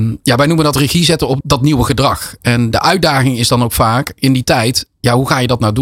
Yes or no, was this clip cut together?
yes